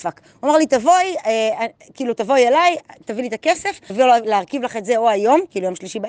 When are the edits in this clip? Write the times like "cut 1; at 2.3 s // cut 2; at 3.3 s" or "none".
cut 1; at 3.9 s